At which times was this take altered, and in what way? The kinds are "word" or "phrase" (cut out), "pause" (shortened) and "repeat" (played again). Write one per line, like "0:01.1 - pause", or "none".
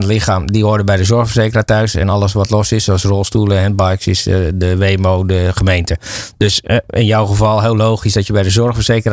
none